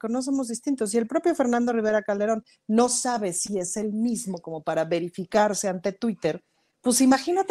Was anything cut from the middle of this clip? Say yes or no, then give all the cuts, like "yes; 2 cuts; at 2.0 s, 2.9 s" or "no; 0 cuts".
no; 0 cuts